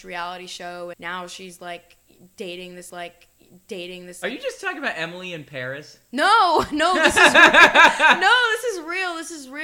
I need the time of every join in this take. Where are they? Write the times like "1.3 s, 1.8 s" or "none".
0.9 s, 2.9 s